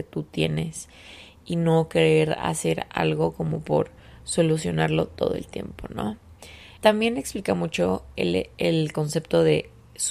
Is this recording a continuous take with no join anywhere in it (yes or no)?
no